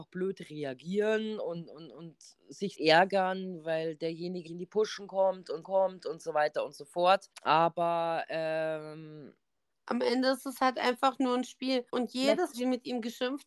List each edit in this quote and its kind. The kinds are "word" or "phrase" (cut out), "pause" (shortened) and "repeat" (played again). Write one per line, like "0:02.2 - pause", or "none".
0:02.7 - word
0:04.5 - word
0:05.6 - repeat
0:07.3 - pause
0:09.5 - pause
0:11.9 - pause
0:12.5 - phrase